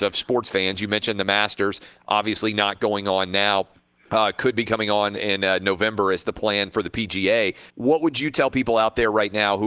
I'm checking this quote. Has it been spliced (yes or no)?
yes